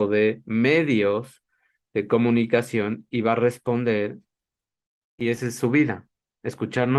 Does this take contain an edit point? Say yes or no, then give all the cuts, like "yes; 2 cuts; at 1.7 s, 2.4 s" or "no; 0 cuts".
no; 0 cuts